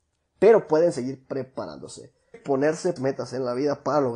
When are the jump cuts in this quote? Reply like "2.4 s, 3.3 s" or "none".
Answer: 2.3 s, 3.0 s